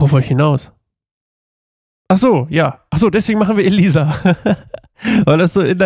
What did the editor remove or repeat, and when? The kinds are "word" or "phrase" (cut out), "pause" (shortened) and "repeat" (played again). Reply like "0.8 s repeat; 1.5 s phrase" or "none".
none